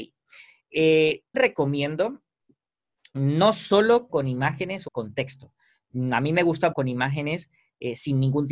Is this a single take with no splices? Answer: no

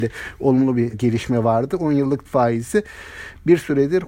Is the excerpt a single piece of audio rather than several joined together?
no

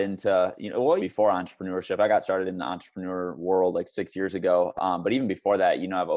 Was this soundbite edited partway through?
yes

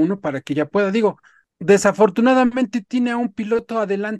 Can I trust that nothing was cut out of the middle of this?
yes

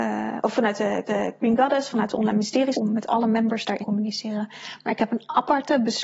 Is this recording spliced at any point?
yes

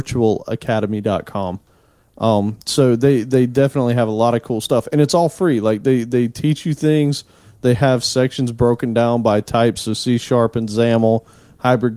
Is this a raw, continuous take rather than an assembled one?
yes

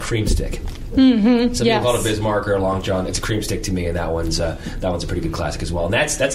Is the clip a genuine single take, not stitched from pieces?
yes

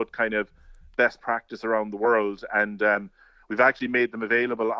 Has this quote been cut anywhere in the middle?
no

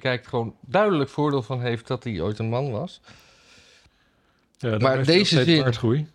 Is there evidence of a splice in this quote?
no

